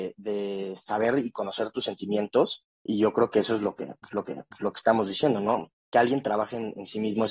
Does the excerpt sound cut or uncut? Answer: cut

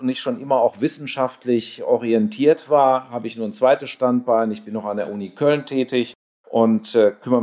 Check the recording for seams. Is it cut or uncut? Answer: uncut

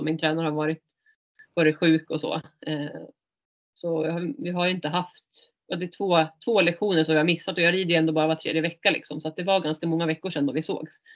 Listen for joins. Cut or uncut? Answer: uncut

